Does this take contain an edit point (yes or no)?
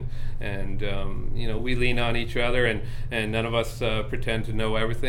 no